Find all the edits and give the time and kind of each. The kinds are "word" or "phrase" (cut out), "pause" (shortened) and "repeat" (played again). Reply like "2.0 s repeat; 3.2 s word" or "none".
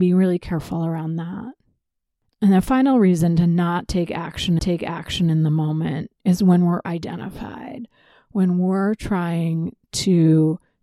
4.6 s repeat; 6.8 s word